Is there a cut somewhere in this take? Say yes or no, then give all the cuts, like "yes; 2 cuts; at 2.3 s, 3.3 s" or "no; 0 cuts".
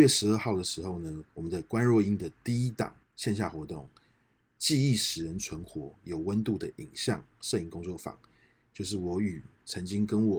yes; 2 cuts; at 1.3 s, 3.0 s